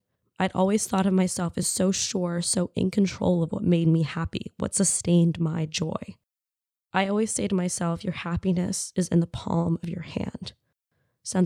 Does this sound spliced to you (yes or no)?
no